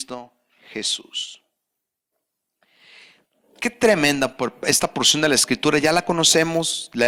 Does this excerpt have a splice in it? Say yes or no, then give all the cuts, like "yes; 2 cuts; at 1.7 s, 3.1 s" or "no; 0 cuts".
no; 0 cuts